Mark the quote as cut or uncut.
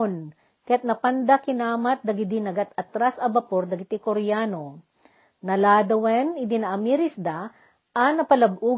uncut